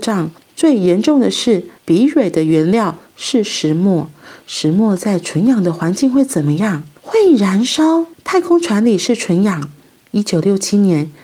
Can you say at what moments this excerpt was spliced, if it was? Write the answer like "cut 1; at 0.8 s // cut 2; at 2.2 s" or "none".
cut 1; at 1.8 s // cut 2; at 8.1 s